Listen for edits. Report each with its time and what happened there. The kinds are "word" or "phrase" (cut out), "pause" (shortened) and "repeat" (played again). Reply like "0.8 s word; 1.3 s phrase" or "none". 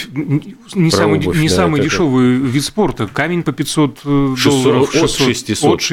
3.4 s word